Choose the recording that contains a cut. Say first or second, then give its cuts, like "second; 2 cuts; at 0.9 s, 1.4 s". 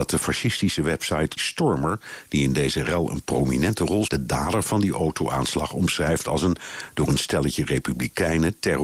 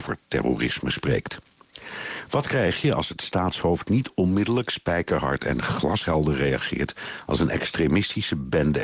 first; 2 cuts; at 1.4 s, 4.1 s